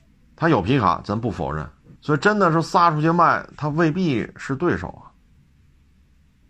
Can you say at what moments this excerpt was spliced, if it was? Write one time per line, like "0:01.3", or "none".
0:02.0